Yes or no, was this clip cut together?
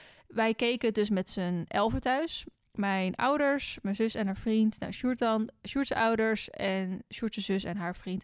no